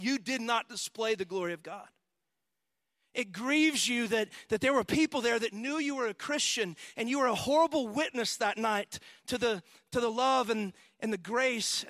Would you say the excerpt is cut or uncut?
uncut